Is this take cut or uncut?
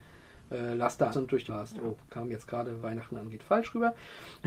cut